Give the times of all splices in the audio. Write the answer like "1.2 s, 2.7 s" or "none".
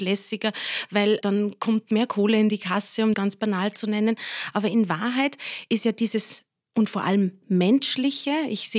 1.2 s, 3.1 s